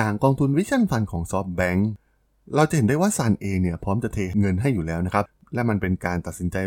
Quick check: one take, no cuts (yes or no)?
yes